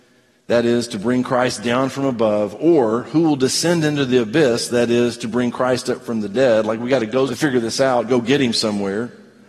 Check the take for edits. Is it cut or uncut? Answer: cut